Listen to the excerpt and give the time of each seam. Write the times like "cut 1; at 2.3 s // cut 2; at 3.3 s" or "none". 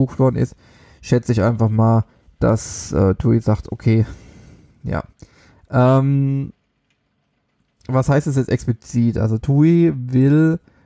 none